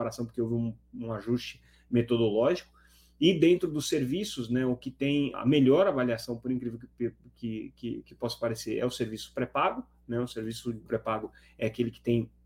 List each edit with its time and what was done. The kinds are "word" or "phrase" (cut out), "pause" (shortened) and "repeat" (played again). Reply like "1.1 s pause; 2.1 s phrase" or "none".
5.3 s word; 10.9 s word